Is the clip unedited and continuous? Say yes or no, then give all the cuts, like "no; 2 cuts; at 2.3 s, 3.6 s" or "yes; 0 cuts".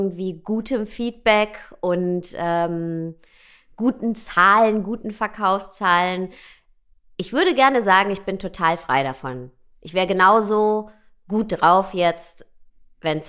yes; 0 cuts